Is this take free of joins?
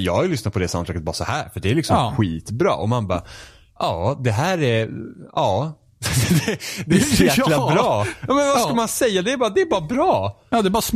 yes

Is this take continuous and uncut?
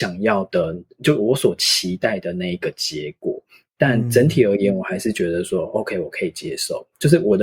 yes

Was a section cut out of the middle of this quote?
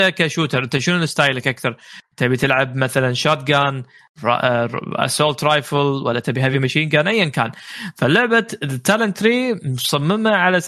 no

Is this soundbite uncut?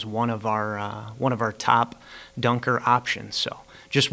yes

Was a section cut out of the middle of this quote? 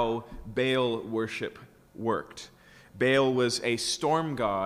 no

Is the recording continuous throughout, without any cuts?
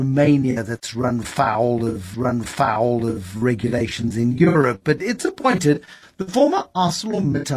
no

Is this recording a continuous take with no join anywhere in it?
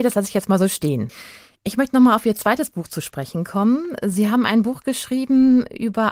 yes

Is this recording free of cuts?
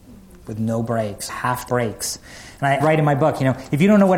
no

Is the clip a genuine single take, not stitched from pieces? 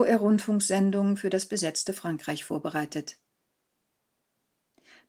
yes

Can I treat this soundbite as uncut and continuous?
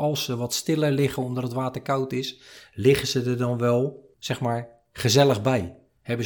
yes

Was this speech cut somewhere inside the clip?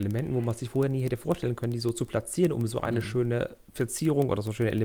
no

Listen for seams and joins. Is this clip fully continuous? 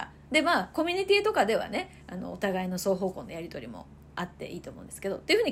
yes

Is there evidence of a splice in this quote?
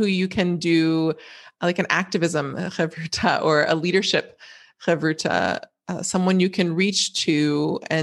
no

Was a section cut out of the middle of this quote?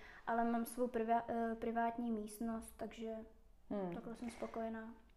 no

